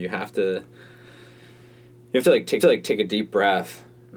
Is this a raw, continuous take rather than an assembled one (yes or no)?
no